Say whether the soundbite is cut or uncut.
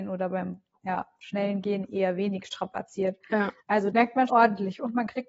cut